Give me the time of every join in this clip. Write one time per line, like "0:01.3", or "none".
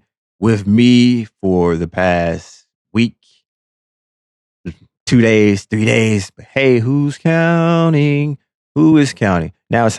none